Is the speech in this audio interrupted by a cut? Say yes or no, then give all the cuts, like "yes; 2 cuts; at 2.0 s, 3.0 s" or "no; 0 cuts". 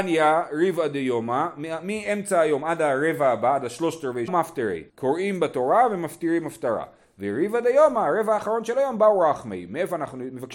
yes; 2 cuts; at 4.3 s, 4.9 s